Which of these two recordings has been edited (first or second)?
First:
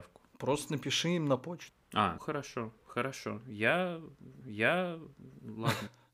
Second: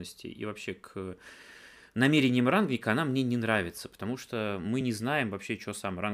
first